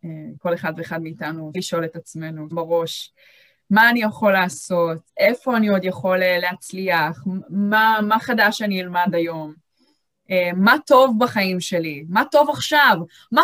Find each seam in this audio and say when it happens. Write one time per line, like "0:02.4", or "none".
0:01.5
0:02.5
0:05.1